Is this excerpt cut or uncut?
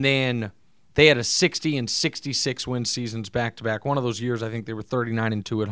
uncut